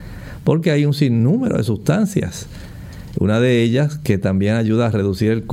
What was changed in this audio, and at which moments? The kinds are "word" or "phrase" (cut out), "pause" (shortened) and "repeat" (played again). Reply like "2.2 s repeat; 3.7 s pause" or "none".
none